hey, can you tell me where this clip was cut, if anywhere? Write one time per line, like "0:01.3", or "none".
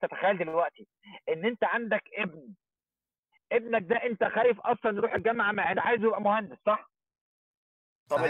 0:05.7